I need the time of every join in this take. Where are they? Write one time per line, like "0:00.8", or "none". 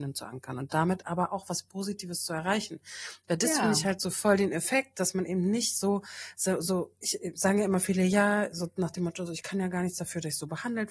none